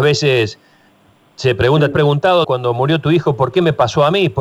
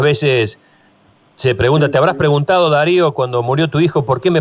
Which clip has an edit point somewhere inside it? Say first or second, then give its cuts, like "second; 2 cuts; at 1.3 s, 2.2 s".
first; 2 cuts; at 1.9 s, 2.4 s